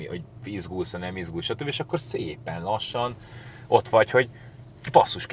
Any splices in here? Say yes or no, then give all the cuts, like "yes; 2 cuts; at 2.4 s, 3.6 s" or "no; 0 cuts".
no; 0 cuts